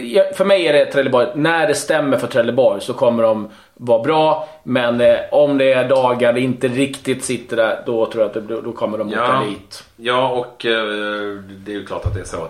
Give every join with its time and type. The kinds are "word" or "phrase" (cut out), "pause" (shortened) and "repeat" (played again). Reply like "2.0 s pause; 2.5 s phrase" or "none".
none